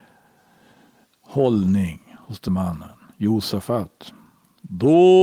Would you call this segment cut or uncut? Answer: cut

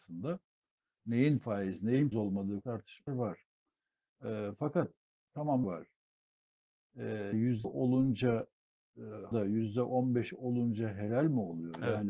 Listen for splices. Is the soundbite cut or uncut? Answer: cut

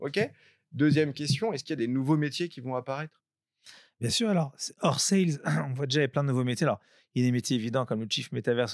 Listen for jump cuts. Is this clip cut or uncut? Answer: uncut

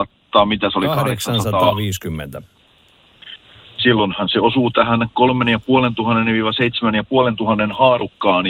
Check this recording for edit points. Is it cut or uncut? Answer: uncut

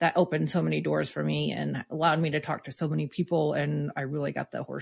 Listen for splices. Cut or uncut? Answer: uncut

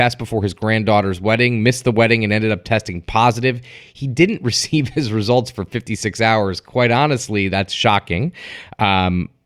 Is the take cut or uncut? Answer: uncut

